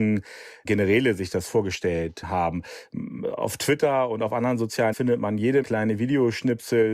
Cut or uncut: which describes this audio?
cut